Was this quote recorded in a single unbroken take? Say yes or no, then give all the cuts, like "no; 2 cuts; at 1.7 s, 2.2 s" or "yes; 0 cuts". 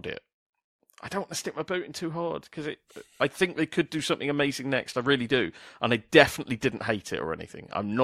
yes; 0 cuts